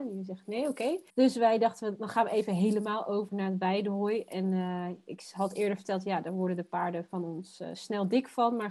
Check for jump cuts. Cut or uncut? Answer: cut